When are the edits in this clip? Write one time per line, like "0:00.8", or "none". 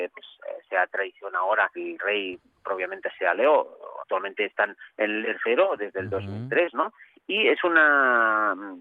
0:01.8
0:04.0
0:05.2